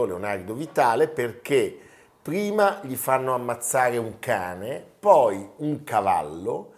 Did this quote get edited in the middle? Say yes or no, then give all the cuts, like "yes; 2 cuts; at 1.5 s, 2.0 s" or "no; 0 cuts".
no; 0 cuts